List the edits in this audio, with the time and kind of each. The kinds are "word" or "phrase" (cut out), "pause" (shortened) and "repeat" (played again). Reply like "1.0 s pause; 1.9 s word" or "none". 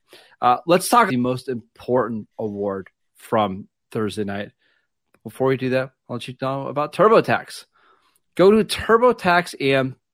1.1 s word

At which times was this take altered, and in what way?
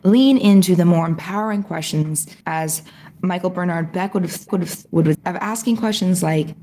2.4 s pause; 4.5 s repeat; 5.1 s word

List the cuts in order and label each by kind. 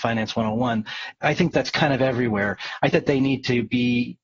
1.5 s word; 2.9 s word

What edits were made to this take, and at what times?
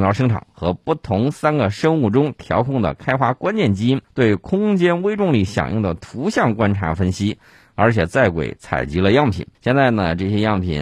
4.0 s pause; 9.5 s pause

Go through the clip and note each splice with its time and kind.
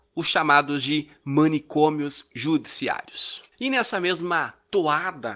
3.5 s pause

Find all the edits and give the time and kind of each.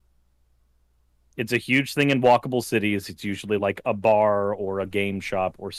none

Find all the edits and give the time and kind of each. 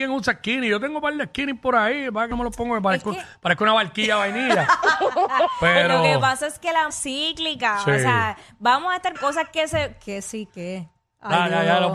2.3 s phrase; 6.9 s word; 9.2 s word

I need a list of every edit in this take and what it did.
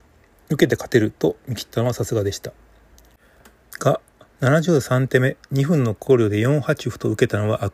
4.3 s pause

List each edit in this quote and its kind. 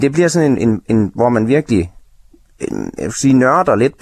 none

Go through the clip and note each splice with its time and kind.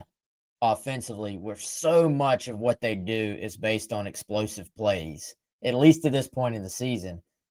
none

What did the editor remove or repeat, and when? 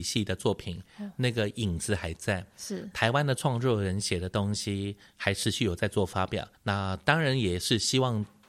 6.5 s pause

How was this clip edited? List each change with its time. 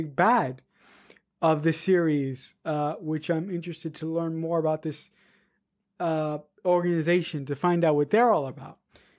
none

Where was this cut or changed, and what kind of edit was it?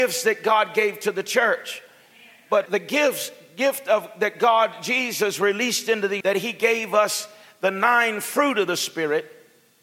2.7 s word; 6.2 s word

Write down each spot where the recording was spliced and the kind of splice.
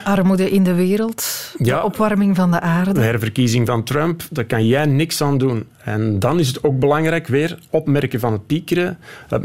none

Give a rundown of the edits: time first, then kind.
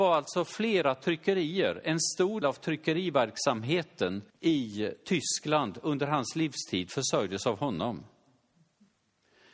2.4 s word; 4.3 s pause

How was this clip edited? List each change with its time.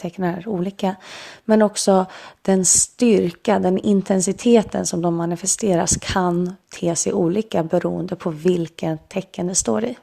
none

